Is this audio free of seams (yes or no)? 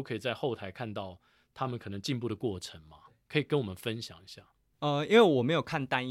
yes